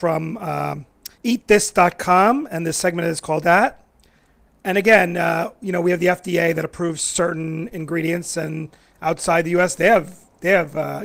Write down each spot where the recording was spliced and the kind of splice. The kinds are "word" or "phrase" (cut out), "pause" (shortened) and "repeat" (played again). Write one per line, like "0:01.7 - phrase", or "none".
0:01.1 - pause
0:03.4 - phrase